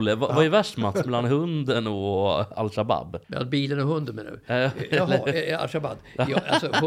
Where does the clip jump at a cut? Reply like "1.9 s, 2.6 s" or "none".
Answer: 3.2 s